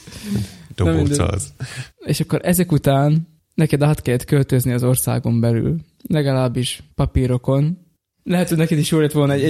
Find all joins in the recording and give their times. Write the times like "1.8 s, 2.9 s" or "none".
1.9 s, 6.9 s

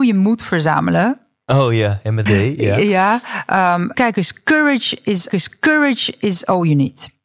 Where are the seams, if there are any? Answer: 2.2 s, 3.9 s, 5.3 s

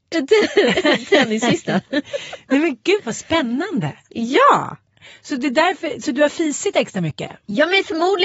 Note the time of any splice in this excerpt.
none

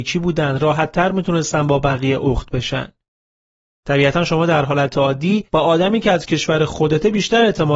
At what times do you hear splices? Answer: 5.5 s

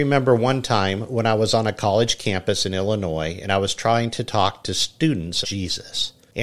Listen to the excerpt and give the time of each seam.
5.4 s

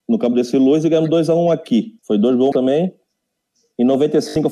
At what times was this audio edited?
2.0 s, 2.5 s

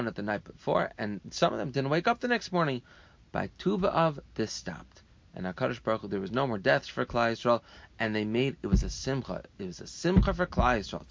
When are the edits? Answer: 4.2 s

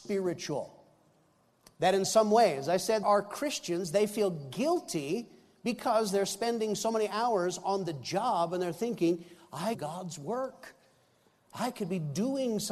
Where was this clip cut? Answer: 3.0 s, 9.7 s

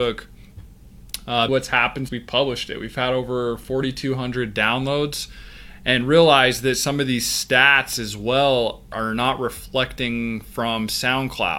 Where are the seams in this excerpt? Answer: 1.5 s, 2.1 s, 8.9 s

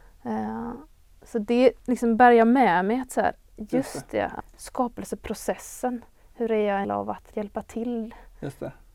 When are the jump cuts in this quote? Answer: 1.8 s, 4.4 s, 6.8 s, 7.3 s

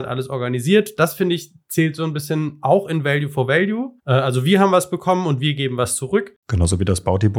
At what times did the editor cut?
4.0 s

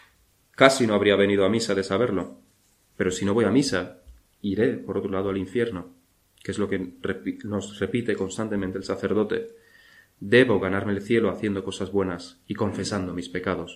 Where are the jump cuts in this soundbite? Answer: none

